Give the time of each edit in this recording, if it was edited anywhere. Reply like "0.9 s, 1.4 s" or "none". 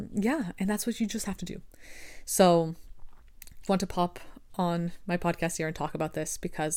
3.7 s